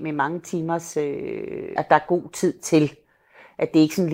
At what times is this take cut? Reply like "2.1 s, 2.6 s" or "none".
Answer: 1.8 s